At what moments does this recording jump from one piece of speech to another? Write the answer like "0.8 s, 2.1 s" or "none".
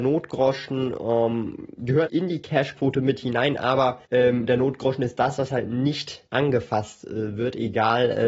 2.1 s, 4.1 s, 6.3 s